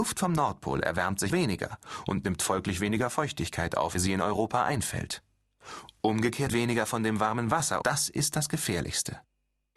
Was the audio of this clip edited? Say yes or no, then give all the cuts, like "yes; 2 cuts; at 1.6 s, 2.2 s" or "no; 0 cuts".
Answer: yes; 4 cuts; at 1.3 s, 3.9 s, 6.5 s, 7.8 s